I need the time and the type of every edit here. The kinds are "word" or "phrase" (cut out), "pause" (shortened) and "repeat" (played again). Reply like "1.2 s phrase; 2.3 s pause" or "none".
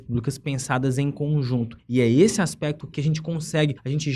2.8 s word

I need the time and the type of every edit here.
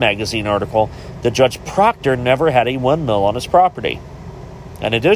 none

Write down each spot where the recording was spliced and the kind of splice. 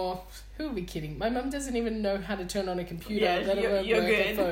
none

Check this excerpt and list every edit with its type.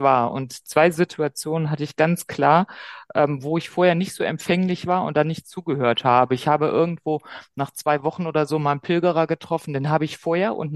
none

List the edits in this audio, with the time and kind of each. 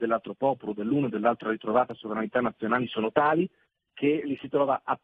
none

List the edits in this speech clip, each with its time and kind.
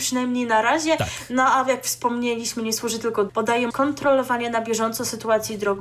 3.3 s word; 3.7 s word

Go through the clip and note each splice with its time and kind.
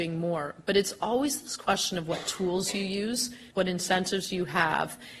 3.5 s pause

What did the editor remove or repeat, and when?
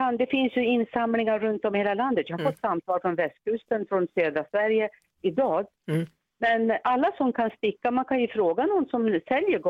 none

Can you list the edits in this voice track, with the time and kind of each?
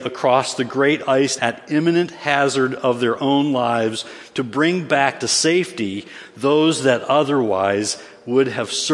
1.4 s word

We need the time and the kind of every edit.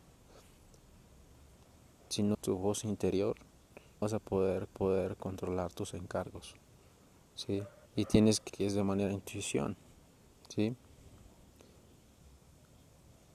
2.3 s word; 4.0 s word; 4.7 s repeat; 7.9 s pause; 8.5 s word; 10.3 s pause

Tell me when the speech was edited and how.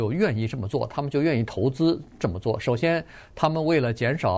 none

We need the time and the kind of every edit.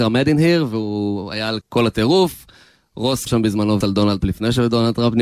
1.6 s word; 3.3 s word; 3.8 s word; 4.2 s word

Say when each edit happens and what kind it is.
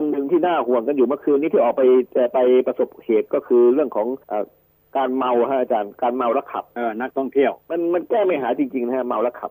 4.2 s pause

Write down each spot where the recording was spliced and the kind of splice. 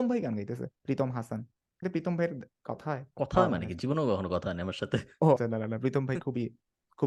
1.8 s word; 3.1 s pause; 5.4 s word

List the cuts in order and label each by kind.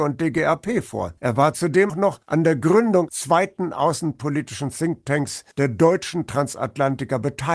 1.2 s pause; 1.9 s word; 2.2 s pause; 3.1 s word; 5.5 s pause

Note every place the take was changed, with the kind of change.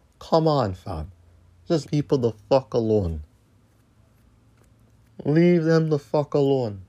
1.8 s word

